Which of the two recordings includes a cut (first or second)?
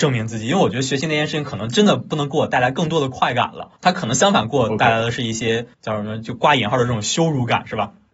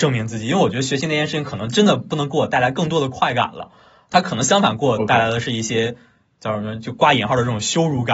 first